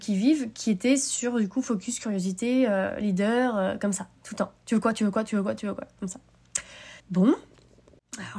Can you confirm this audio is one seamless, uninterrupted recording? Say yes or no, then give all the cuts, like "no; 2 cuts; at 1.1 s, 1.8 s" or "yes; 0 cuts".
no; 2 cuts; at 4.1 s, 7.0 s